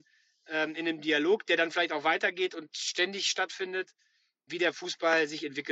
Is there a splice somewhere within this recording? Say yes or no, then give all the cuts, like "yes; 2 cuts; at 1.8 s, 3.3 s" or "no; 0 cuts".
no; 0 cuts